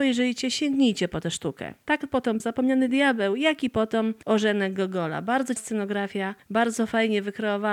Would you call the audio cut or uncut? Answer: cut